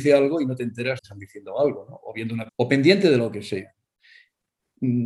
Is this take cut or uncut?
cut